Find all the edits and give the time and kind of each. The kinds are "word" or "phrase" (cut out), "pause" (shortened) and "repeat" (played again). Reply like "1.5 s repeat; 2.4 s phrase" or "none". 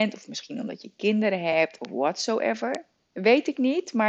none